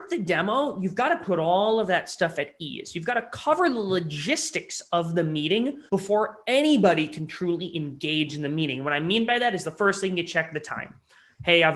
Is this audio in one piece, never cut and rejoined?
no; 1 cut; at 5.9 s

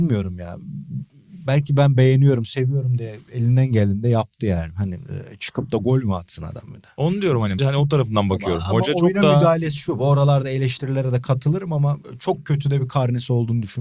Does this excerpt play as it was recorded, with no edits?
no; 1 cut; at 7.6 s

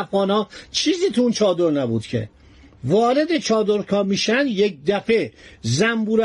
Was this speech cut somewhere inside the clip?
no; 0 cuts

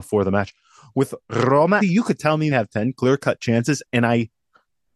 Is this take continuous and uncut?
no; 2 cuts; at 1.8 s, 2.5 s

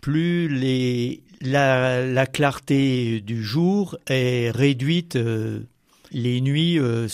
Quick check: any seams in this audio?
no; 0 cuts

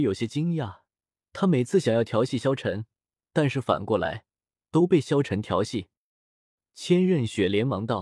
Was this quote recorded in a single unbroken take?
yes; 0 cuts

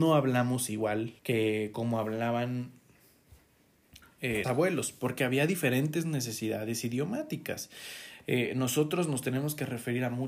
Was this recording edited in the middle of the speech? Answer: yes; 2 cuts; at 1.2 s, 4.4 s

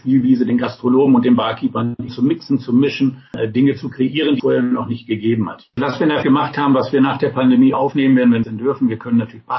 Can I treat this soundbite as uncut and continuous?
no; 5 cuts; at 2.1 s, 4.4 s, 6.2 s, 7.7 s, 8.4 s

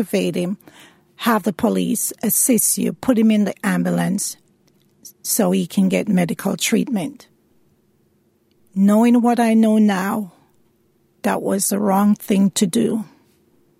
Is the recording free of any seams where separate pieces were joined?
yes; 0 cuts

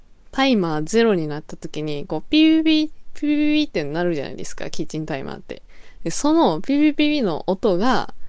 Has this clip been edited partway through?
no; 0 cuts

